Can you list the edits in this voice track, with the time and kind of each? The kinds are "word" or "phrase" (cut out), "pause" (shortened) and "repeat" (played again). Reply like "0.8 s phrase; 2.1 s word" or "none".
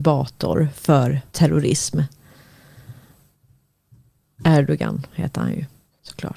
1.3 s pause